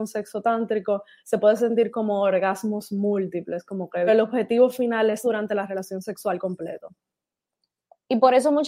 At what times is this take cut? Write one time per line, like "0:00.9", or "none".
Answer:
0:04.1
0:05.2